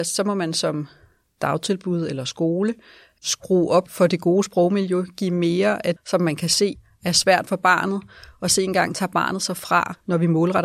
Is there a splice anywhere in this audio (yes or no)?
yes